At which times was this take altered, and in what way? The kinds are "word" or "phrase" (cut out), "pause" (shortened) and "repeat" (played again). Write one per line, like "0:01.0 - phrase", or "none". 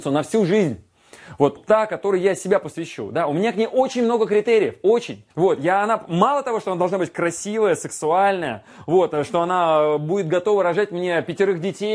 0:01.6 - word
0:05.3 - pause